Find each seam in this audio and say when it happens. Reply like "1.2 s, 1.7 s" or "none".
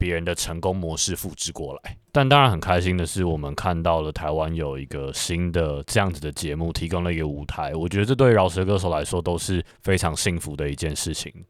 2.1 s